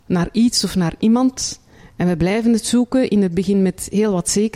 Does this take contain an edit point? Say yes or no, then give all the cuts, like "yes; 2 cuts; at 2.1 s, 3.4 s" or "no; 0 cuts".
no; 0 cuts